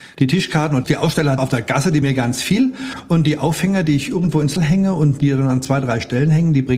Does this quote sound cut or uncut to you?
cut